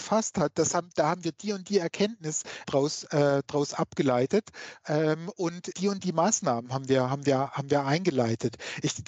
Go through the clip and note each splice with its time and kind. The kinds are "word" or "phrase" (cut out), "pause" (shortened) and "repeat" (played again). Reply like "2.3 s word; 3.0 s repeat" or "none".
2.6 s word; 5.7 s word